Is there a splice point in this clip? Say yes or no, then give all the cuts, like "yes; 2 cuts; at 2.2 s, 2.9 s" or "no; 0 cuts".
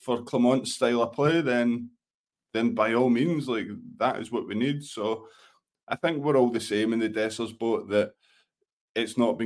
no; 0 cuts